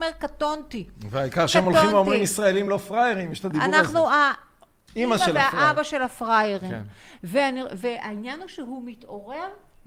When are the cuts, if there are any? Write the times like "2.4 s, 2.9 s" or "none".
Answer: none